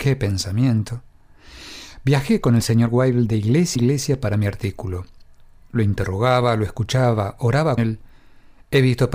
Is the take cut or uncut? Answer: cut